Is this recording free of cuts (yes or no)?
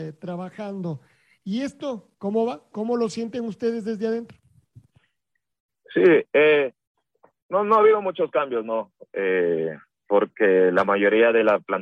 yes